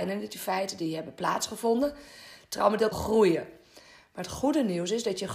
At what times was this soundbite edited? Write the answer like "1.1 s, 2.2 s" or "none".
2.9 s